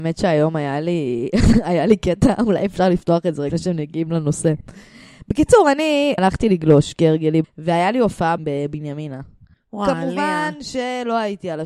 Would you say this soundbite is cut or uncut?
cut